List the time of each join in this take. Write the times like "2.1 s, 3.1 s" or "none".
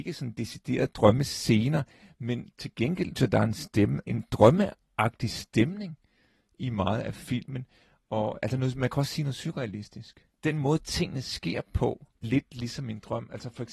3.2 s, 4.1 s, 12.2 s